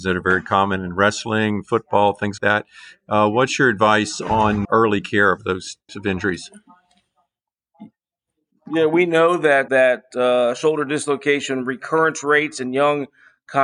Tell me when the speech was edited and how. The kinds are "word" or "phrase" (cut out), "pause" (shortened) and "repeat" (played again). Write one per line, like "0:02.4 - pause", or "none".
0:02.4 - word
0:04.6 - word
0:05.9 - word
0:09.7 - word

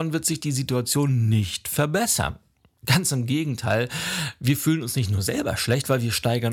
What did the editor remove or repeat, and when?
none

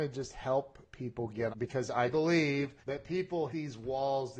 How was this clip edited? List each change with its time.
0:01.5 - word
0:02.1 - word
0:02.8 - pause
0:03.5 - word

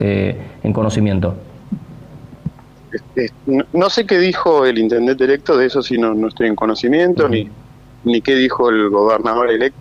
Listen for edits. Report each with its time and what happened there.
none

